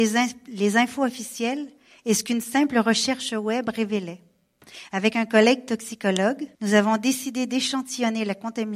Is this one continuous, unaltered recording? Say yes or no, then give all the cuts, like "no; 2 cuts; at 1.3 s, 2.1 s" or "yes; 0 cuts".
no; 1 cut; at 6.5 s